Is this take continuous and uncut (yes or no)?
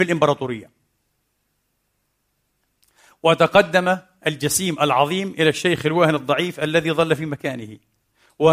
yes